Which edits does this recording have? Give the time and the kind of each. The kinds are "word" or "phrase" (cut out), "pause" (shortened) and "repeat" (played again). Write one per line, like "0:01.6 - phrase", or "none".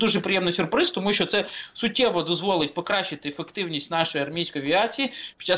none